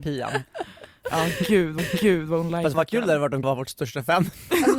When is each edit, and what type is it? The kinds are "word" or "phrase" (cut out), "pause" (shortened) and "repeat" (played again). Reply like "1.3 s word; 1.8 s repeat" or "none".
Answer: 1.8 s repeat; 2.7 s word; 3.4 s word